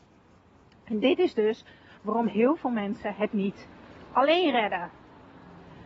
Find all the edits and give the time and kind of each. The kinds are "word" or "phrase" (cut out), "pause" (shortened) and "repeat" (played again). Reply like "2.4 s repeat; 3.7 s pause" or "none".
none